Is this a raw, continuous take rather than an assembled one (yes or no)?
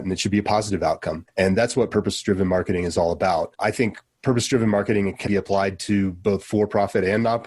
no